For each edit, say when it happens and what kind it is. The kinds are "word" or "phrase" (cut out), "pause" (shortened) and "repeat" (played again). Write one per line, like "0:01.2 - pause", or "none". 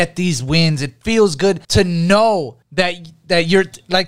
0:01.6 - pause
0:02.6 - pause